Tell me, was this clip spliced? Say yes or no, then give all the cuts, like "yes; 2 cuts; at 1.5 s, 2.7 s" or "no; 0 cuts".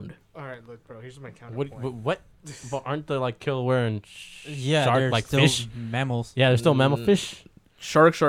no; 0 cuts